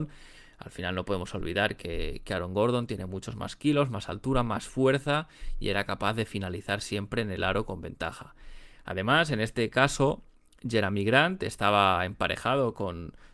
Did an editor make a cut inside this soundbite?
no; 0 cuts

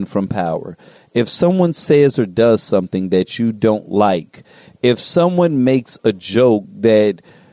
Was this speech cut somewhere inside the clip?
no; 0 cuts

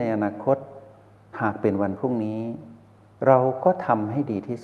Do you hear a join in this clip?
no; 0 cuts

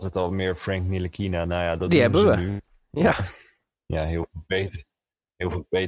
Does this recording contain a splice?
no; 0 cuts

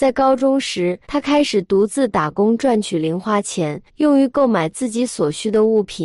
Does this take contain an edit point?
yes; 2 cuts; at 1.0 s, 3.9 s

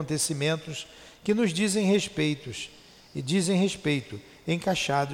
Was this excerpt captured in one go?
yes; 0 cuts

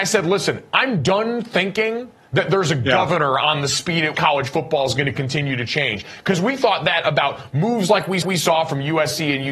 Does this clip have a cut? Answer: yes; 2 cuts; at 4.1 s, 8.2 s

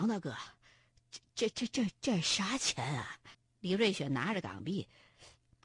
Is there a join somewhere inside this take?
yes; 1 cut; at 3.3 s

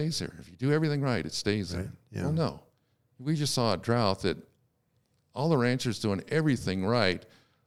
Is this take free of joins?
yes; 0 cuts

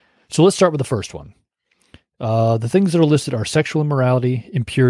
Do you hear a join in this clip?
no; 0 cuts

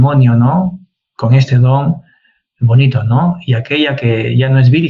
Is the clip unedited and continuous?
yes; 0 cuts

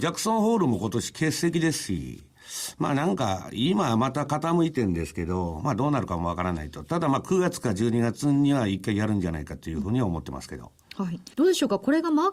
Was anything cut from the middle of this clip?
yes; 1 cut; at 11.3 s

